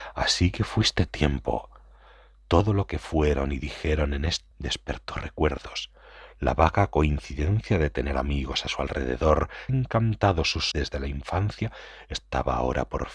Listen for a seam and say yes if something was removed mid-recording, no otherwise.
yes